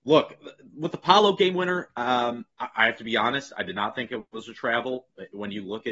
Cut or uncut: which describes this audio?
cut